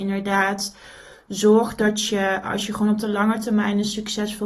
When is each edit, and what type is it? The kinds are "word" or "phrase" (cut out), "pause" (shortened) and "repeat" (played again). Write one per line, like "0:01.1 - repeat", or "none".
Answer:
none